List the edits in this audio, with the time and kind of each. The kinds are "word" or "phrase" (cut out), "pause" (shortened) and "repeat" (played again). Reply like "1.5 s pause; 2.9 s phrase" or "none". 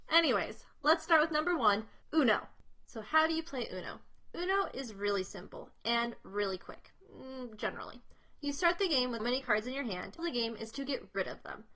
2.0 s pause; 9.2 s word; 10.2 s phrase